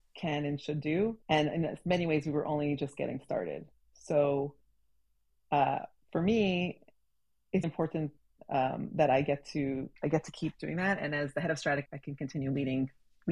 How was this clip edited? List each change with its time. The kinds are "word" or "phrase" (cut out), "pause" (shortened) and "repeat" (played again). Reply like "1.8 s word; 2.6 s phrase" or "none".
1.2 s pause; 7.6 s word; 10.0 s pause; 11.9 s word